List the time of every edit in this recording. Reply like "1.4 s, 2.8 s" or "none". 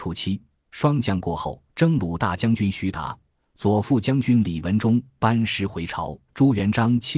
1.7 s, 6.3 s

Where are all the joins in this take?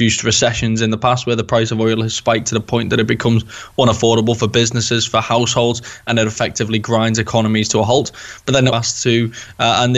8.7 s

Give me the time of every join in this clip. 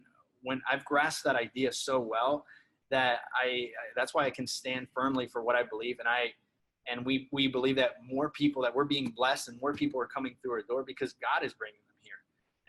none

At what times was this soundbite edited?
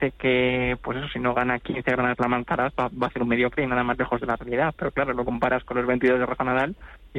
none

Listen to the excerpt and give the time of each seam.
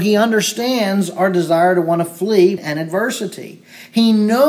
2.6 s

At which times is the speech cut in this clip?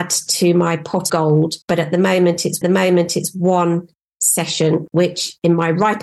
1.1 s, 1.6 s, 2.6 s, 4.9 s

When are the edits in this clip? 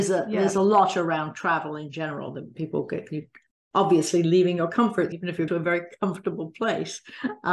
5.1 s, 5.5 s

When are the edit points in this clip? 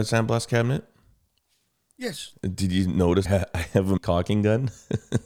3.2 s, 4.0 s

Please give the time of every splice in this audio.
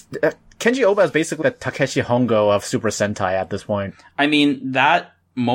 1.4 s

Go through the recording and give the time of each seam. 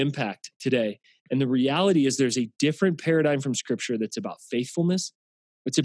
none

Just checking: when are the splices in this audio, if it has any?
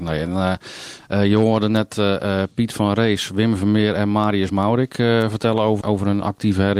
5.8 s

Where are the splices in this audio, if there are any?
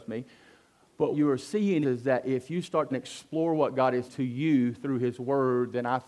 1.1 s, 1.8 s, 2.9 s, 4.1 s

